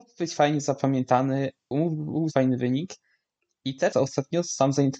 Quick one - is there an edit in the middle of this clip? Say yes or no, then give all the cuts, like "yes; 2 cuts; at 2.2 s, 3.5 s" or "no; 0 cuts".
yes; 3 cuts; at 1.7 s, 2.3 s, 3.9 s